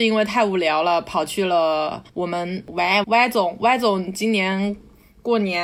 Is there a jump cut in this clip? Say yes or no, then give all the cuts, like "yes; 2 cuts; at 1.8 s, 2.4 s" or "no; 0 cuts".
yes; 2 cuts; at 2.1 s, 3.0 s